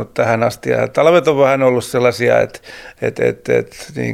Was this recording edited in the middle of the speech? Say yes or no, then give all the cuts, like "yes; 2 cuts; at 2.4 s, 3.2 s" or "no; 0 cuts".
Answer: no; 0 cuts